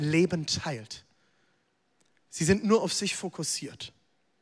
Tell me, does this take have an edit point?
no; 0 cuts

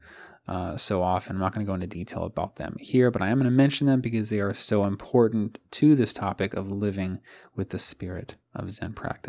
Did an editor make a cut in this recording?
no; 0 cuts

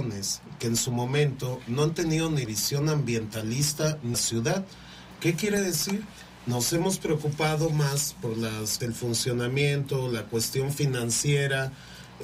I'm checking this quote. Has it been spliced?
yes; 3 cuts; at 2.5 s, 4.1 s, 8.8 s

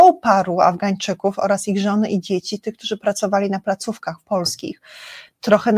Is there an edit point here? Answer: no; 0 cuts

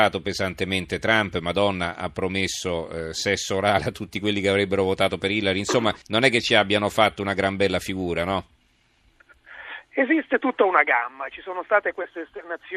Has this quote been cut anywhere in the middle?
yes; 1 cut; at 6.0 s

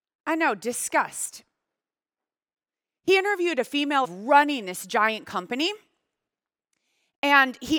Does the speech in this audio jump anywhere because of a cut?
yes; 1 cut; at 4.0 s

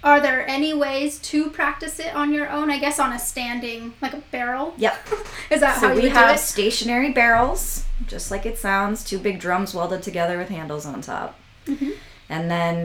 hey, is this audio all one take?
yes; 0 cuts

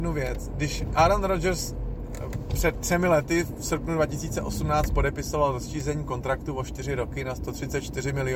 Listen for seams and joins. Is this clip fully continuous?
yes; 0 cuts

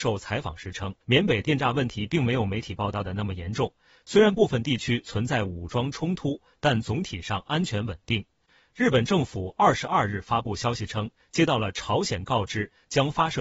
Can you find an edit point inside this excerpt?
yes; 1 cut; at 1.0 s

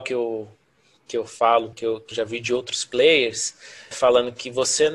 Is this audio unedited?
no; 3 cuts; at 1.7 s, 2.1 s, 3.9 s

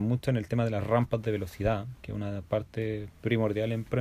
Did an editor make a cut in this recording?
no; 0 cuts

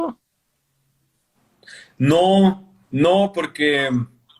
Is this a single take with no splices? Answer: no; 1 cut; at 2.8 s

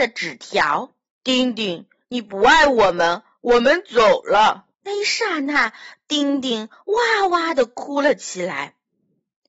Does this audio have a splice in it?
yes; 2 cuts; at 1.1 s, 4.7 s

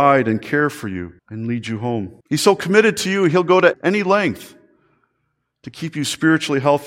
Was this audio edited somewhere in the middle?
yes; 3 cuts; at 1.2 s, 2.2 s, 3.7 s

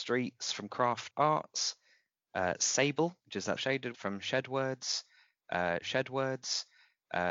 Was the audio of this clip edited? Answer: yes; 5 cuts; at 1.1 s, 3.2 s, 3.6 s, 3.9 s, 5.8 s

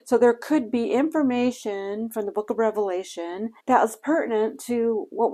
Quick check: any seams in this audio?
yes; 1 cut; at 3.6 s

